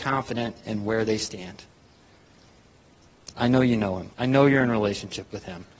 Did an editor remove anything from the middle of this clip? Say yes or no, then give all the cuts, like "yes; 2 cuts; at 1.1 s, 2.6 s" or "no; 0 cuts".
yes; 1 cut; at 4.1 s